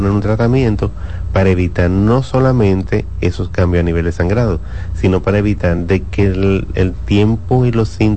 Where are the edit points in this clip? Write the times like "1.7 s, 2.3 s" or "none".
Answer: none